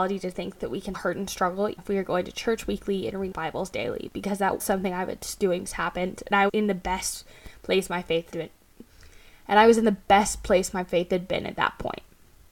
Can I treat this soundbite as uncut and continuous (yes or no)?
no